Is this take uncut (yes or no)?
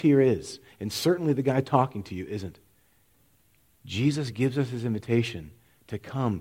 yes